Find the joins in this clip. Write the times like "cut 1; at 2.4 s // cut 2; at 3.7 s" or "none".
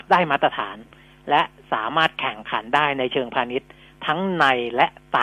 none